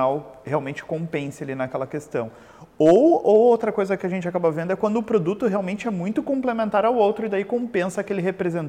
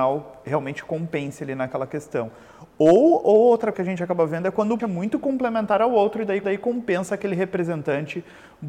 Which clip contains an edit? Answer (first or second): second